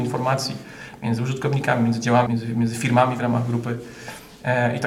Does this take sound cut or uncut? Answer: cut